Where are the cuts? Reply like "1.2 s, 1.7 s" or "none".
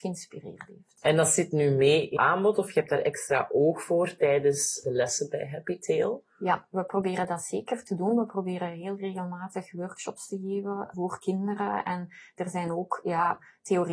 2.2 s